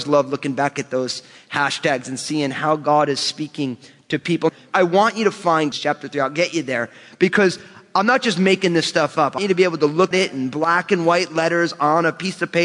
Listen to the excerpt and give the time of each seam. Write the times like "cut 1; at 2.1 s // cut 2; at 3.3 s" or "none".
cut 1; at 5.7 s // cut 2; at 9.4 s // cut 3; at 10.1 s